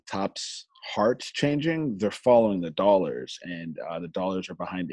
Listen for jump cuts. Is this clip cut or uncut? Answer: uncut